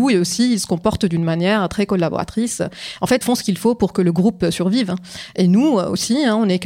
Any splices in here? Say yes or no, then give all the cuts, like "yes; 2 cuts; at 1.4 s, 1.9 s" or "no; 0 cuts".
yes; 1 cut; at 3.2 s